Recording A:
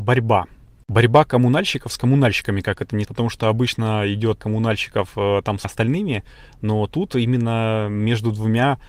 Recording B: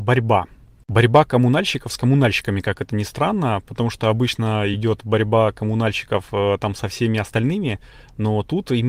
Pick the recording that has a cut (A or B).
A